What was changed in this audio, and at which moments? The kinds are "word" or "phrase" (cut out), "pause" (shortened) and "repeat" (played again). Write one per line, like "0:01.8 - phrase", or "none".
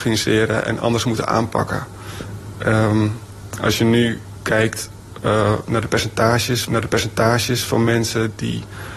0:06.6 - repeat